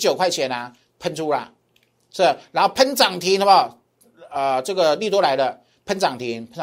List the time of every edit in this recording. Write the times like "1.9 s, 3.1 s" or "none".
none